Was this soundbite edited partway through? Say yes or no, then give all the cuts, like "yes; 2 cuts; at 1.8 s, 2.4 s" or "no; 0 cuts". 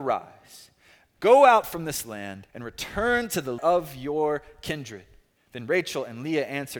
yes; 3 cuts; at 2.5 s, 3.6 s, 5.4 s